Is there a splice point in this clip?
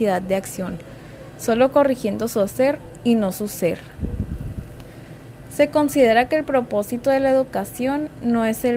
no; 0 cuts

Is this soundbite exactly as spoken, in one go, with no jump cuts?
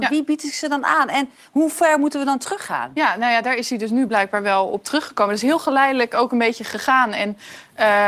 yes; 0 cuts

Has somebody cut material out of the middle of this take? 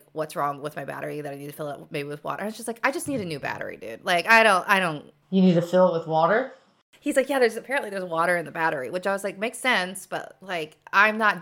no; 0 cuts

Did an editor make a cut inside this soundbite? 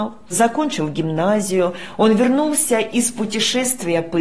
no; 0 cuts

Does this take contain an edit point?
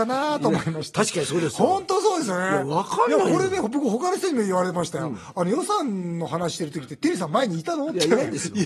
no; 0 cuts

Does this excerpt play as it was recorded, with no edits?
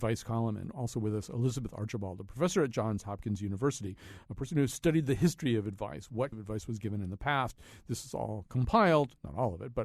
no; 1 cut; at 6.3 s

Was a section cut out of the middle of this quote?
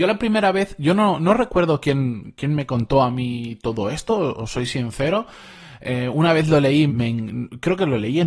yes; 1 cut; at 6.9 s

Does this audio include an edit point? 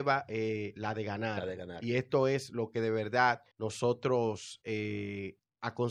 yes; 1 cut; at 3.5 s

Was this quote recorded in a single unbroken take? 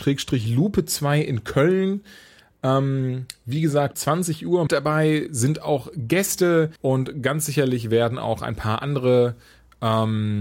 no; 3 cuts; at 3.9 s, 4.7 s, 6.8 s

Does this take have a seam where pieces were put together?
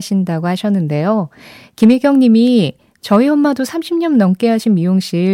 no; 0 cuts

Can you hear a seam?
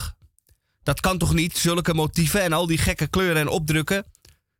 no; 0 cuts

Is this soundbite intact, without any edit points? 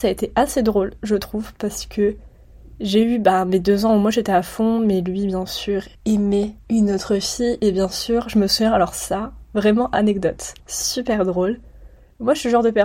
no; 2 cuts; at 6.0 s, 10.6 s

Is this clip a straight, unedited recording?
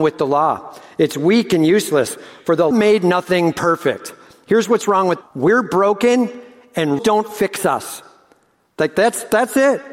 no; 3 cuts; at 2.7 s, 5.2 s, 7.0 s

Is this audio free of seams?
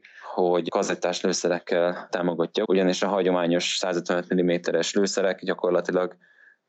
no; 1 cut; at 2.6 s

